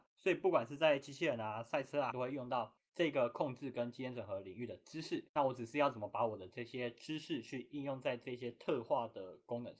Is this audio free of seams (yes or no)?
no